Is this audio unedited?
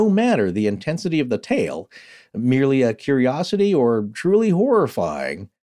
yes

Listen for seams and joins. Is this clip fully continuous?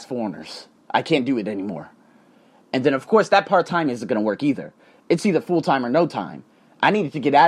yes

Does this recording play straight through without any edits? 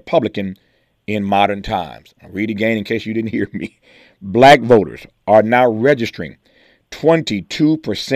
yes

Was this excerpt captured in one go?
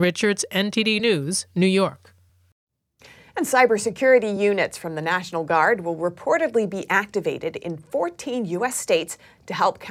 yes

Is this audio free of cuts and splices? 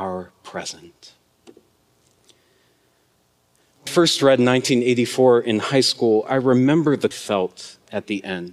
no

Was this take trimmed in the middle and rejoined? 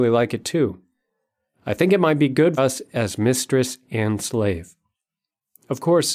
yes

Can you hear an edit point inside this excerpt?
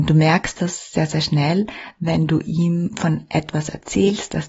no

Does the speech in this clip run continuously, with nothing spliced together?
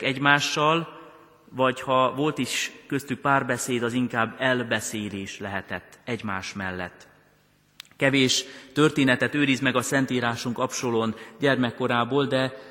yes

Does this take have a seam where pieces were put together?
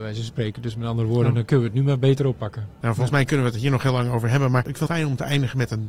yes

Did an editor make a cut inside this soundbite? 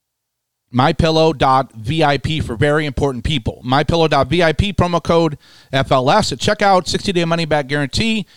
no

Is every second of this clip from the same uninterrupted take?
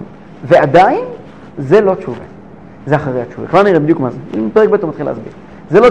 yes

